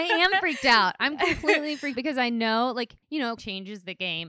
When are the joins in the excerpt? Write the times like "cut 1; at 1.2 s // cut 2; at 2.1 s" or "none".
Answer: cut 1; at 2.0 s // cut 2; at 3.0 s // cut 3; at 3.4 s